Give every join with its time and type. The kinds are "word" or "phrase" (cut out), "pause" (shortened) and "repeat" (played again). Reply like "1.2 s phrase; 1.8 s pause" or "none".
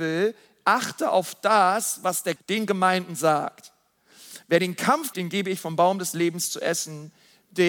2.4 s word; 5.1 s word